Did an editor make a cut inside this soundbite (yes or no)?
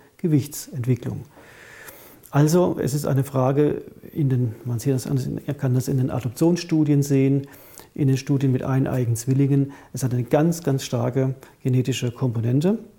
no